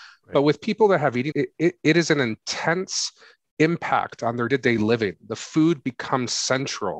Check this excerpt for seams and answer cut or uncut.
cut